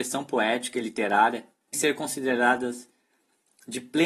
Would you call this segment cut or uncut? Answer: cut